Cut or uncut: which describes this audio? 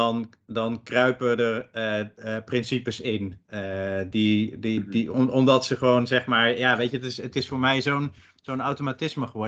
uncut